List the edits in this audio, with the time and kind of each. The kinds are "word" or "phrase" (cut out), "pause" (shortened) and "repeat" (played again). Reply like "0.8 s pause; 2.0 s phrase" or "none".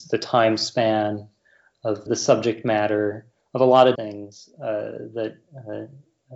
2.1 s word; 3.9 s word